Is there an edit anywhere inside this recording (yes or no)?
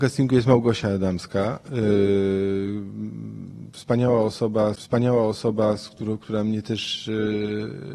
yes